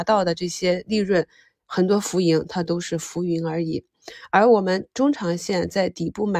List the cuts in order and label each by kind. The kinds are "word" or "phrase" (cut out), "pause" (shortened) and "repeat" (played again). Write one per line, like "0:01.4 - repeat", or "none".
none